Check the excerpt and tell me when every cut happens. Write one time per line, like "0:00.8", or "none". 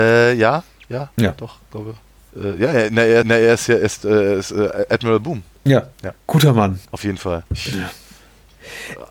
0:03.2
0:05.9
0:06.9
0:07.5